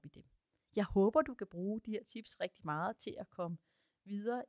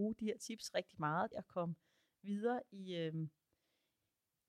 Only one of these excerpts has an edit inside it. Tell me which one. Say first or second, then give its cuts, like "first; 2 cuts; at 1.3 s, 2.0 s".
second; 1 cut; at 1.3 s